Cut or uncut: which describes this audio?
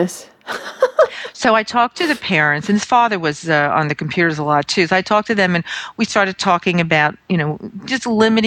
uncut